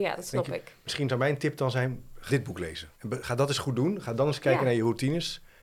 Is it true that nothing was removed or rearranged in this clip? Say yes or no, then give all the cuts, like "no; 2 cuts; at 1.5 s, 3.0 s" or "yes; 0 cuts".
no; 2 cuts; at 2.3 s, 3.0 s